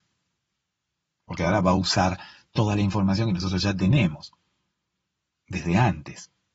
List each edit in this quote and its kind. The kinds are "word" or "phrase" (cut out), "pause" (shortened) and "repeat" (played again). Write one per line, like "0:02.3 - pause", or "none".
none